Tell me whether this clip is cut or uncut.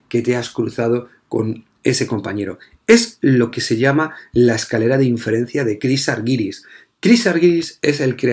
uncut